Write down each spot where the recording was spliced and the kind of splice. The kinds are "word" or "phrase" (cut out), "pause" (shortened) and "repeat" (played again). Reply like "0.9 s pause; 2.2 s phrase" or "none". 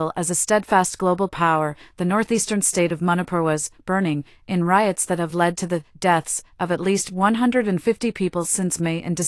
none